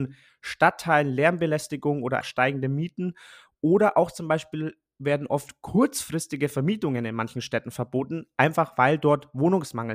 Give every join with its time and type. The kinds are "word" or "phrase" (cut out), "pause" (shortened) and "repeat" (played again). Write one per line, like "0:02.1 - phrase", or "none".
0:02.2 - word